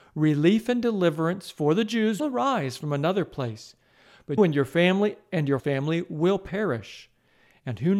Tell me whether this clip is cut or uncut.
cut